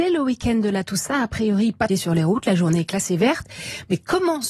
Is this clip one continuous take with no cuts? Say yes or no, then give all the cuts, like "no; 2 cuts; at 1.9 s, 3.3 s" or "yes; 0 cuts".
no; 1 cut; at 1.9 s